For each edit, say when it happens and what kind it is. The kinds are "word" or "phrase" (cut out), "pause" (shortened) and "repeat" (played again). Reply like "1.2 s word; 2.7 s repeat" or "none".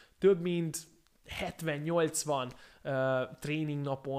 none